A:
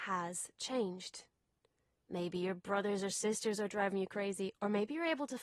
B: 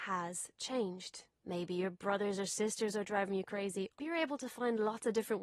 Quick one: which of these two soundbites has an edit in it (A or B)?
B